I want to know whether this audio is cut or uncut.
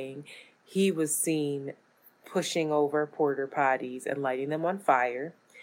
uncut